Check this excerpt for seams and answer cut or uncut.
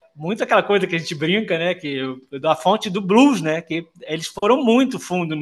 uncut